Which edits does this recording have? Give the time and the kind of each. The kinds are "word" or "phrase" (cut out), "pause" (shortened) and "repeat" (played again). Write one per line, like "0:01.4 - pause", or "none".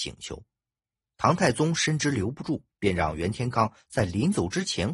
0:02.7 - pause